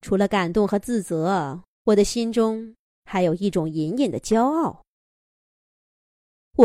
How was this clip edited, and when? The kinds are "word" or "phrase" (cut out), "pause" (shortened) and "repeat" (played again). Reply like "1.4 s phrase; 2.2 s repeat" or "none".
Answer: none

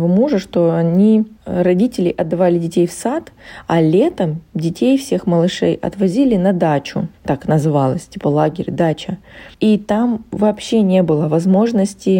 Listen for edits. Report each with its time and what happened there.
1.4 s pause; 7.1 s pause; 9.5 s pause

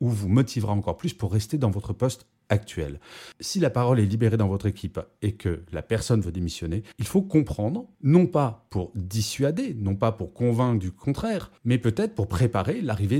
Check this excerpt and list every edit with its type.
6.9 s pause

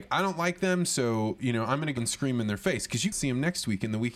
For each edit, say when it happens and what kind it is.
2.0 s word; 3.1 s word

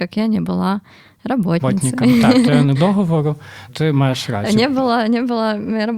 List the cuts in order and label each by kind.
2.7 s word; 3.7 s word

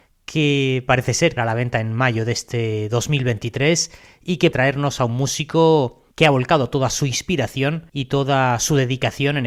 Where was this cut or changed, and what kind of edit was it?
1.4 s word; 4.5 s word; 6.1 s pause; 7.9 s pause

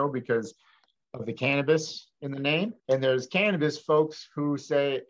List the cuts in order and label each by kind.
2.8 s pause

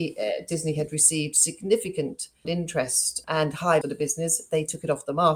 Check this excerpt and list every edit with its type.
2.4 s word; 3.2 s word; 3.8 s word

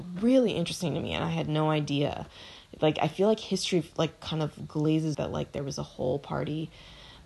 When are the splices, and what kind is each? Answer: 5.1 s phrase

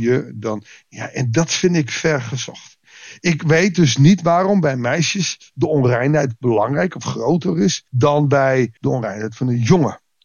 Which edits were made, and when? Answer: 7.9 s pause; 8.8 s pause

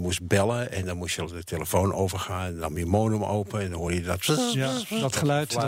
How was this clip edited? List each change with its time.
none

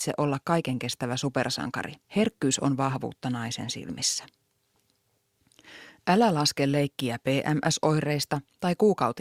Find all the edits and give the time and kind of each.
2.0 s pause

